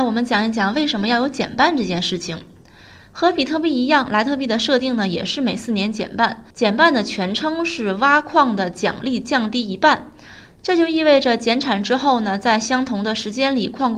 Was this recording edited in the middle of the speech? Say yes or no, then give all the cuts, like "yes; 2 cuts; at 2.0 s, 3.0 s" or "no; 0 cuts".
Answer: yes; 1 cut; at 6.5 s